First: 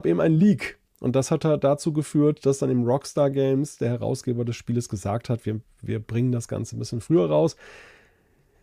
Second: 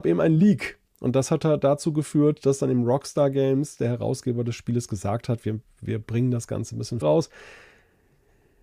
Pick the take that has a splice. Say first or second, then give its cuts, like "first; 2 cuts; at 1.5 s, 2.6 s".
second; 1 cut; at 7.0 s